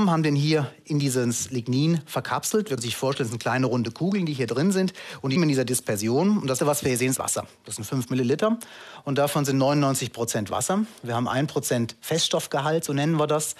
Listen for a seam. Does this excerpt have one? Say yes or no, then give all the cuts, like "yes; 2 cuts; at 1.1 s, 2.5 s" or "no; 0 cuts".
yes; 4 cuts; at 2.8 s, 5.4 s, 6.6 s, 7.2 s